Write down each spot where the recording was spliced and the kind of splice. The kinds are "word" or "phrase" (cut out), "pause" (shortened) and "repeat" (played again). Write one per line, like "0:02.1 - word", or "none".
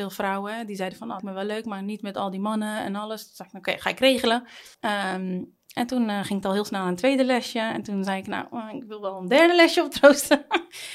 0:01.2 - word
0:04.7 - pause